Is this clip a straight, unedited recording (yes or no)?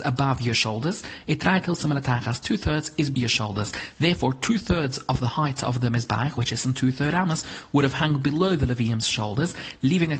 no